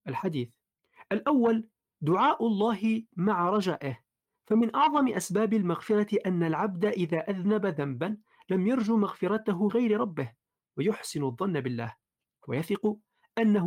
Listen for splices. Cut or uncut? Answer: cut